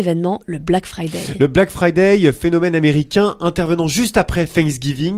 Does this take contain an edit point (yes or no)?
no